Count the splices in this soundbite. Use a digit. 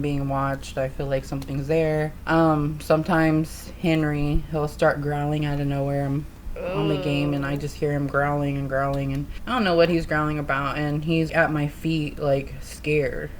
1